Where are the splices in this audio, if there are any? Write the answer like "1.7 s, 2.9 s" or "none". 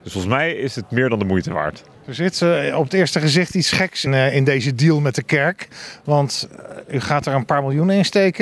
4.1 s